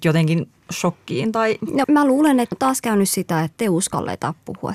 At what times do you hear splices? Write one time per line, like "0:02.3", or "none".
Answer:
0:01.8
0:02.5